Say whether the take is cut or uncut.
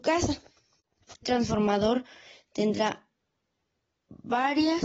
cut